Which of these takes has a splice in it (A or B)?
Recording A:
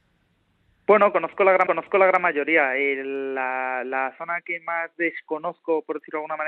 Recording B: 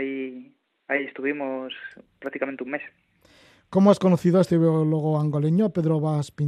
A